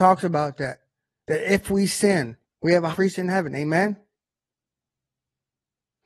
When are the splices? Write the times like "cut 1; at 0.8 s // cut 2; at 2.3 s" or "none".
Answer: cut 1; at 2.4 s // cut 2; at 2.9 s

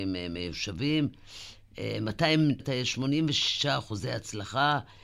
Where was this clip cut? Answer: cut 1; at 2.6 s

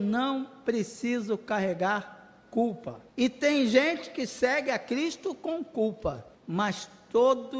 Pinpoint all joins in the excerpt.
cut 1; at 3.1 s // cut 2; at 6.3 s

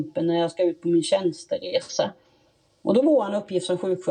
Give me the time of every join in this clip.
cut 1; at 3.0 s

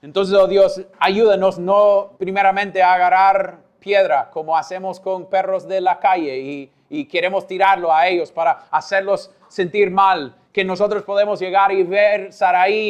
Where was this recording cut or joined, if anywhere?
cut 1; at 2.2 s

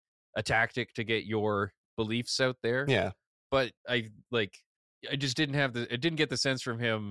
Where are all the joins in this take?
cut 1; at 3.8 s

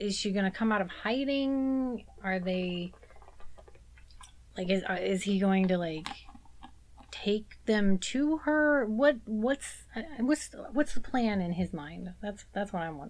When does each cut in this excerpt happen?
none

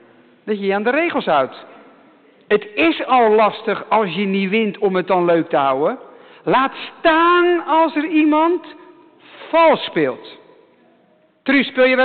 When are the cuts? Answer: none

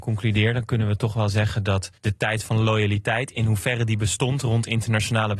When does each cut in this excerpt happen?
cut 1; at 2.0 s

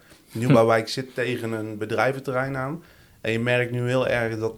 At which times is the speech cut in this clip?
none

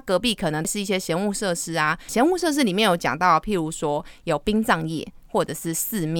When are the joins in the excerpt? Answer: cut 1; at 2.1 s

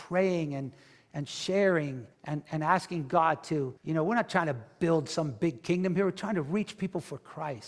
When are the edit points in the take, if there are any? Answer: cut 1; at 2.1 s // cut 2; at 3.8 s

